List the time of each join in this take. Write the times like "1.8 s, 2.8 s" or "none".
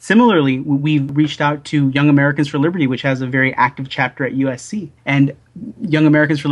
5.0 s